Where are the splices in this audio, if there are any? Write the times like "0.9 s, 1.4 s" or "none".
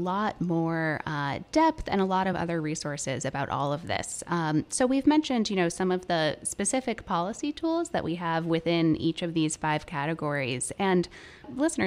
none